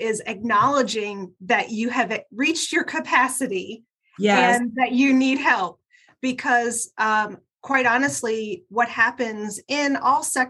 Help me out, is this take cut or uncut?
uncut